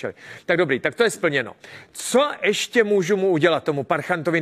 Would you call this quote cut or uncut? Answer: uncut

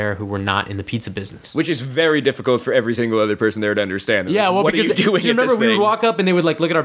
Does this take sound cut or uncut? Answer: uncut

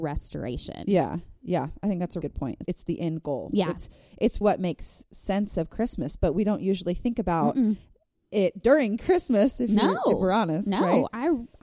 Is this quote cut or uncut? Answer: cut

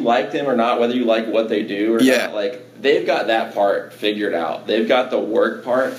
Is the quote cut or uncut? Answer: uncut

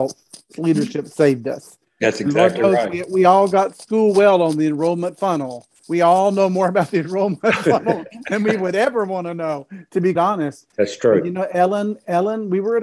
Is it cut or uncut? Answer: cut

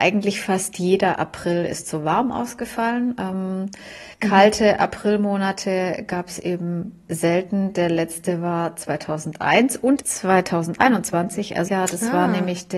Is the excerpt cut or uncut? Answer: cut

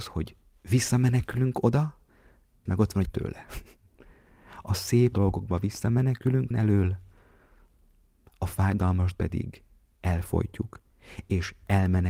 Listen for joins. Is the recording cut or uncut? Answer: cut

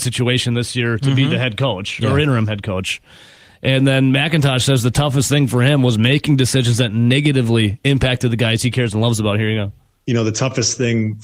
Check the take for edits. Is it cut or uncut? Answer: uncut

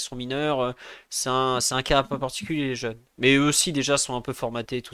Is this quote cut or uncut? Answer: uncut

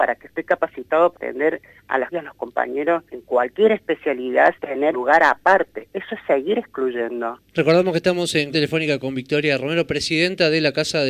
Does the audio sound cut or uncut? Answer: cut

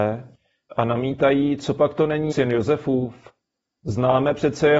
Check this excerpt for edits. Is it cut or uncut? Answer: cut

